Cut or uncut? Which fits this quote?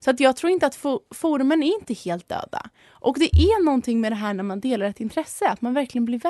uncut